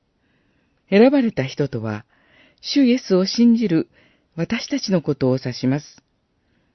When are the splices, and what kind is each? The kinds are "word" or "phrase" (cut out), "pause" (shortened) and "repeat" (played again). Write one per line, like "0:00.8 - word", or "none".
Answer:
none